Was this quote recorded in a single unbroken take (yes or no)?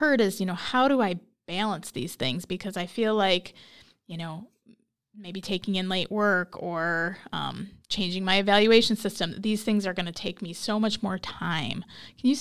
yes